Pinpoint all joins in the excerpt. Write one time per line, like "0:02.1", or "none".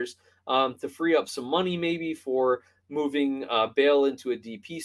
none